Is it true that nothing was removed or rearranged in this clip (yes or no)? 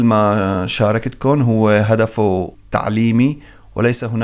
no